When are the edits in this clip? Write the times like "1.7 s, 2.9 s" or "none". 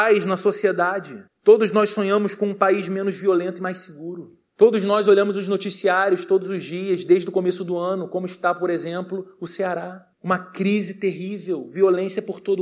1.3 s, 4.5 s, 10.1 s